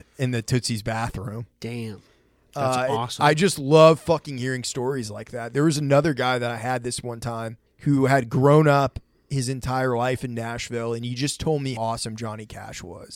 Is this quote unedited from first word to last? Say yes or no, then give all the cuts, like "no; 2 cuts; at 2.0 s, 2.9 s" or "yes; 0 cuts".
no; 2 cuts; at 7.7 s, 11.8 s